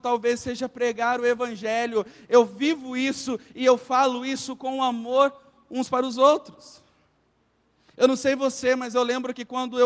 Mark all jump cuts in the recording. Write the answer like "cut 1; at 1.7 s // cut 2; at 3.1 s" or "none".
none